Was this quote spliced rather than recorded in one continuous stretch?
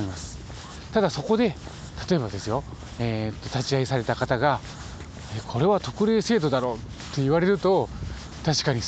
no; 0 cuts

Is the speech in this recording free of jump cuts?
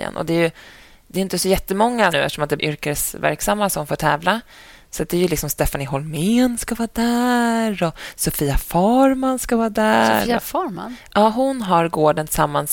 no; 2 cuts; at 2.1 s, 2.6 s

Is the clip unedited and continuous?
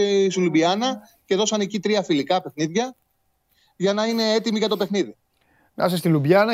yes; 0 cuts

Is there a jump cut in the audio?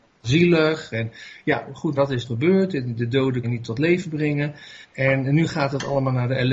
yes; 4 cuts; at 2.0 s, 2.3 s, 3.4 s, 4.8 s

